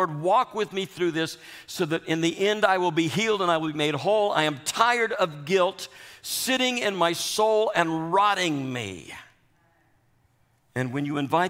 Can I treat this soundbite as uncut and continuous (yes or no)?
yes